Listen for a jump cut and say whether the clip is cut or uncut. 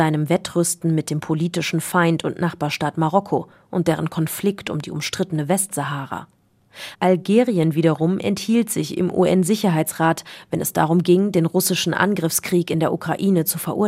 uncut